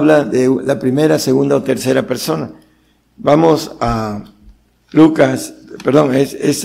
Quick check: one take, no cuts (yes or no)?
yes